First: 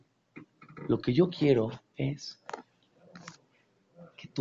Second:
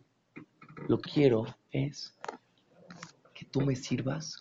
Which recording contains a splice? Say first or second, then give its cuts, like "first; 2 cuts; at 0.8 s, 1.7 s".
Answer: second; 2 cuts; at 1.1 s, 3.2 s